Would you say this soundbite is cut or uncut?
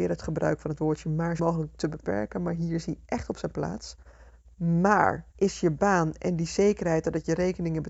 cut